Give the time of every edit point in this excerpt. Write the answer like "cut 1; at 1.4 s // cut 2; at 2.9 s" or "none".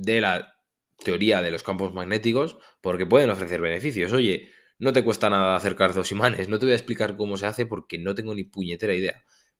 cut 1; at 2.6 s

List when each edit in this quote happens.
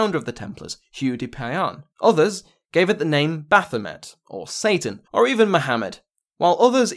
cut 1; at 1.9 s // cut 2; at 5.1 s

